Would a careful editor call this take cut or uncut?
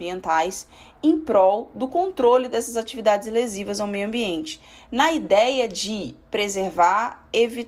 uncut